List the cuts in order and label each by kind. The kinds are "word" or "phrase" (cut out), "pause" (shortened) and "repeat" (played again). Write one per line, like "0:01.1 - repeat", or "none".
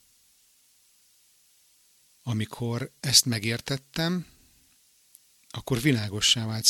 none